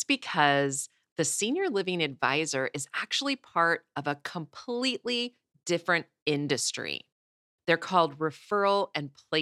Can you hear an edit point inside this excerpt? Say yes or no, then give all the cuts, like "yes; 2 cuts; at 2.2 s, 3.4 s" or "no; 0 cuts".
no; 0 cuts